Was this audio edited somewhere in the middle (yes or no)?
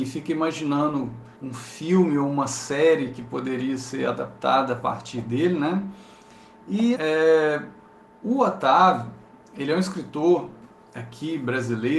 yes